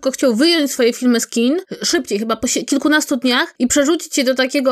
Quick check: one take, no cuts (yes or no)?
yes